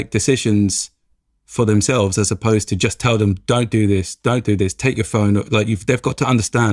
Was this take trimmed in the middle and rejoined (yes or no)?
no